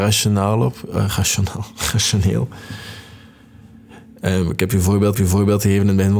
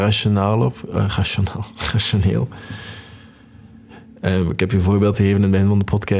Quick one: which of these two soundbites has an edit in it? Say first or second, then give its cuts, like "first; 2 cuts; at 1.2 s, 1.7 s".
first; 1 cut; at 5.1 s